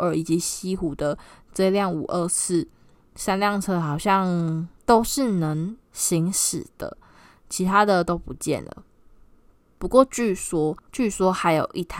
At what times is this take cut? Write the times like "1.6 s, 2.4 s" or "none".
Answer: 4.8 s, 5.8 s, 10.9 s